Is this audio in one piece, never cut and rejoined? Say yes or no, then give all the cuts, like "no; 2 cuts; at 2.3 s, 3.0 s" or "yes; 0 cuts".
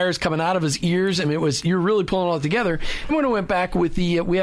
no; 1 cut; at 3.1 s